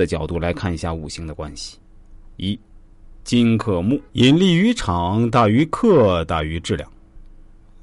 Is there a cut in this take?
yes; 1 cut; at 4.1 s

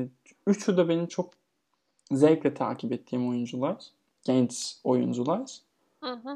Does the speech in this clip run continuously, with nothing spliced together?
yes; 0 cuts

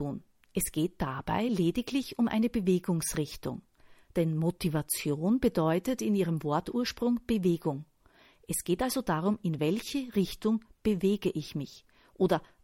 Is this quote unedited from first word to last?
yes; 0 cuts

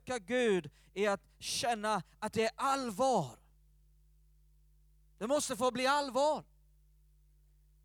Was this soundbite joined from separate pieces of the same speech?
no; 0 cuts

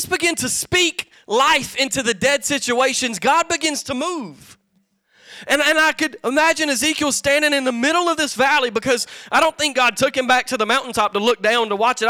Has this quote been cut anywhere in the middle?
no; 0 cuts

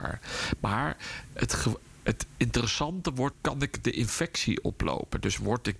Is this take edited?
yes; 1 cut; at 3.3 s

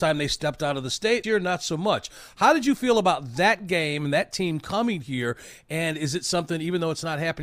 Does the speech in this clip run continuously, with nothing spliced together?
no; 1 cut; at 1.2 s

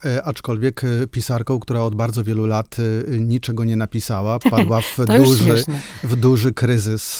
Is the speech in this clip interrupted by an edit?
yes; 1 cut; at 4.4 s

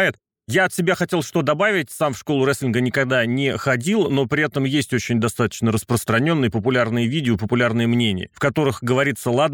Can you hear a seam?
no; 0 cuts

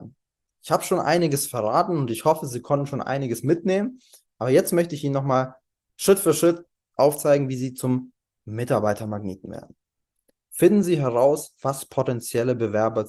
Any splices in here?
no; 0 cuts

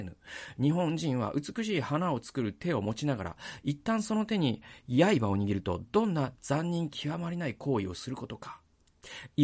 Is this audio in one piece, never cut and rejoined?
yes; 0 cuts

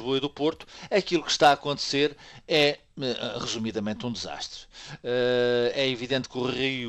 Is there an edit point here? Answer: no; 0 cuts

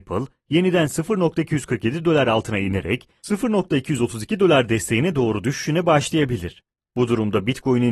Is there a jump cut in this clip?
no; 0 cuts

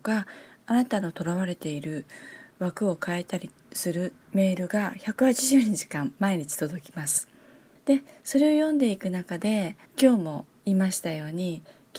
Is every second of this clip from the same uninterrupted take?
yes; 0 cuts

